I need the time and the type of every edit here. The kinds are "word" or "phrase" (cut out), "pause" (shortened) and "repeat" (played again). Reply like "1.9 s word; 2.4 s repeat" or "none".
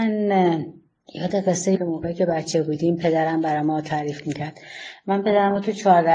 1.7 s word